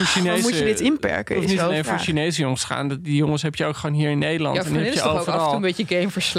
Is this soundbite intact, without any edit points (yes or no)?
yes